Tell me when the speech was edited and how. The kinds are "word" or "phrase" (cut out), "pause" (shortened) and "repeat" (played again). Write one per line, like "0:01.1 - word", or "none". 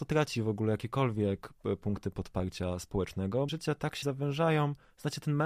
0:03.5 - phrase
0:04.0 - word